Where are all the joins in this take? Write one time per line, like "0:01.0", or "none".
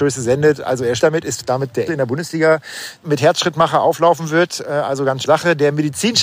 0:01.0
0:01.9
0:03.0
0:05.3